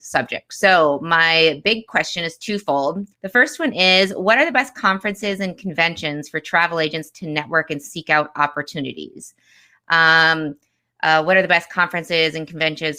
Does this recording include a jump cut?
yes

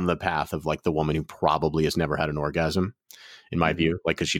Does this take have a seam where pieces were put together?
no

